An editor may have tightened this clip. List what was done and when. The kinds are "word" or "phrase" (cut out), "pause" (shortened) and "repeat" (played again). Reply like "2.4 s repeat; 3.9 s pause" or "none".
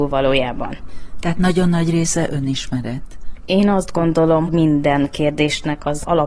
4.5 s phrase